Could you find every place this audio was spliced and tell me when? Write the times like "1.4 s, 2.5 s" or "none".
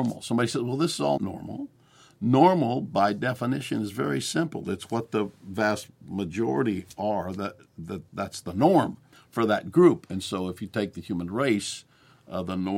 1.2 s, 8.1 s, 9.1 s